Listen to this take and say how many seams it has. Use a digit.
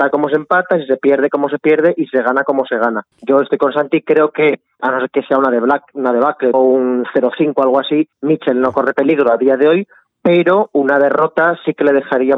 4